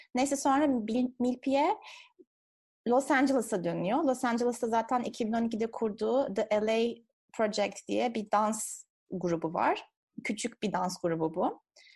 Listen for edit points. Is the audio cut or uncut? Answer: uncut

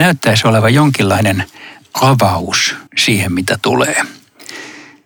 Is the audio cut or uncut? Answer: cut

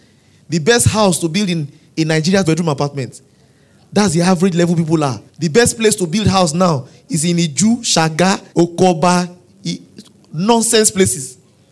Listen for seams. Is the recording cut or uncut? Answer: cut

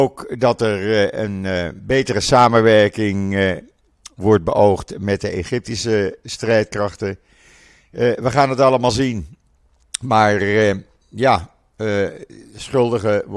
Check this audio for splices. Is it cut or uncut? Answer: uncut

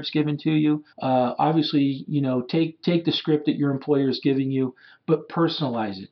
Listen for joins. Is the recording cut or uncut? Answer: cut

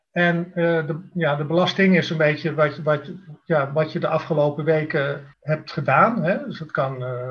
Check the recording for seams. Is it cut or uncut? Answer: cut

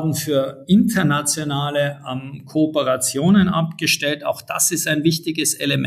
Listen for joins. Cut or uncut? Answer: uncut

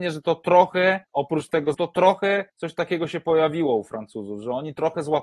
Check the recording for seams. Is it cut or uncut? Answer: cut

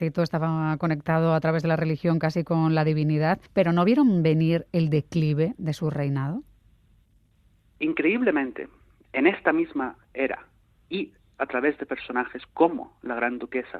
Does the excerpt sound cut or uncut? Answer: cut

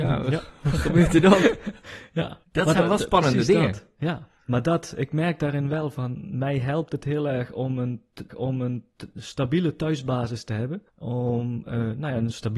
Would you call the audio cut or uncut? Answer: cut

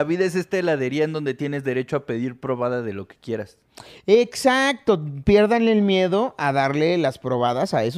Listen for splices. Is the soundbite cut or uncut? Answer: uncut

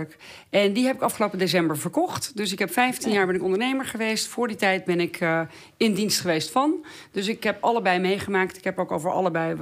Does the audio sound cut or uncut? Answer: uncut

